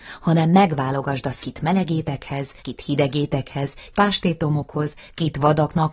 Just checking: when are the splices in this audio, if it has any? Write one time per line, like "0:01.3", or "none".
0:01.4
0:02.6
0:03.9